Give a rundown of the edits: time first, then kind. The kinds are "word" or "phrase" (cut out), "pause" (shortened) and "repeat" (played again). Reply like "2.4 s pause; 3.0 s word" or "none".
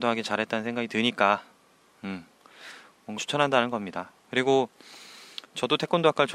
3.2 s word